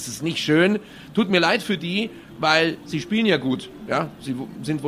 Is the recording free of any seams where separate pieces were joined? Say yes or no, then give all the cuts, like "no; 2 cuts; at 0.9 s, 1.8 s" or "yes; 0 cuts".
yes; 0 cuts